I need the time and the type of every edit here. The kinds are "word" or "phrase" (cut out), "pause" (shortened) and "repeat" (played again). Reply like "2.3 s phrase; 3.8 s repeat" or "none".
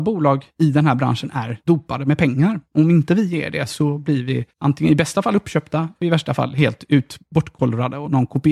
4.5 s pause